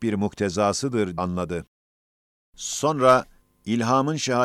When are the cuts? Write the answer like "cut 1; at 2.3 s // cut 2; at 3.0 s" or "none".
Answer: cut 1; at 1.2 s // cut 2; at 3.4 s